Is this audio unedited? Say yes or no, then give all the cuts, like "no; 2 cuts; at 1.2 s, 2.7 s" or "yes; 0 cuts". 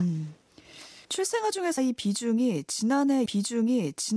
no; 3 cuts; at 1.0 s, 1.8 s, 3.3 s